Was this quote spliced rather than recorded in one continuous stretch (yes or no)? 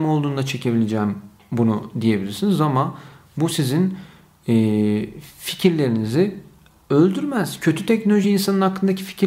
no